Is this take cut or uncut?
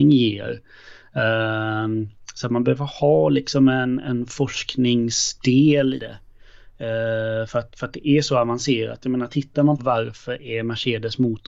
cut